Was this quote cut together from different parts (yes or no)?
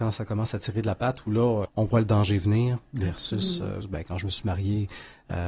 yes